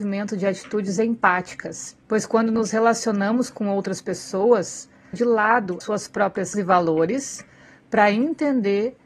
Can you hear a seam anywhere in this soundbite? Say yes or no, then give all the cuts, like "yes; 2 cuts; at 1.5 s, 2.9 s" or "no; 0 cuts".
yes; 4 cuts; at 2.0 s, 5.1 s, 5.8 s, 6.5 s